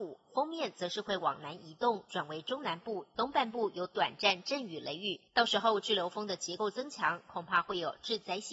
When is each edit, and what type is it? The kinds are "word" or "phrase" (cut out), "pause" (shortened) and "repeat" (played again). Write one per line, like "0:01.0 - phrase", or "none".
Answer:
0:05.3 - pause